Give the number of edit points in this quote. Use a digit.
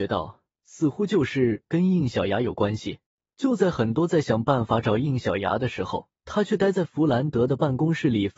2